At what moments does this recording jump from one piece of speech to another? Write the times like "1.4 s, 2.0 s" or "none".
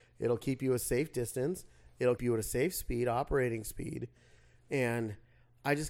2.2 s